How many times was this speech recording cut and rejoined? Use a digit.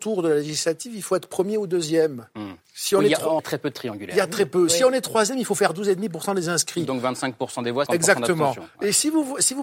3